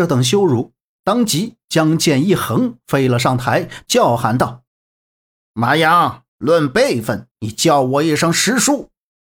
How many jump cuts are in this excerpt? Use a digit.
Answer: 3